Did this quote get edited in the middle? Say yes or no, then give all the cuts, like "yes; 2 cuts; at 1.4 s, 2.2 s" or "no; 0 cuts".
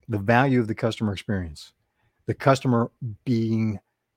no; 0 cuts